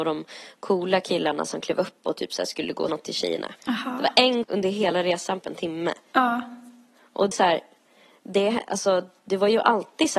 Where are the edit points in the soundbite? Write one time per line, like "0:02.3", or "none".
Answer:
0:02.9
0:03.6
0:04.4
0:05.4
0:07.3